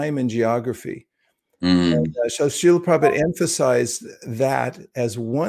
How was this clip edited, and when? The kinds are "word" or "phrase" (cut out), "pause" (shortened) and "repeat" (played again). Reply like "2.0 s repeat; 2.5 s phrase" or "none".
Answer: none